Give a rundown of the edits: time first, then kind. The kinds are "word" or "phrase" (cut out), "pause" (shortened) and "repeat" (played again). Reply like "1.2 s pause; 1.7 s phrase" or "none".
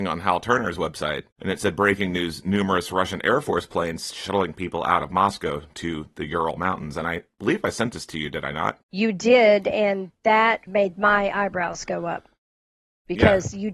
1.3 s pause; 8.8 s pause; 10.7 s word